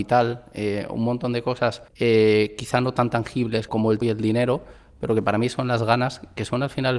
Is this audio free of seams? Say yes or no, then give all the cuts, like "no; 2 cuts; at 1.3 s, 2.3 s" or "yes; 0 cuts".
no; 3 cuts; at 1.9 s, 3.7 s, 4.0 s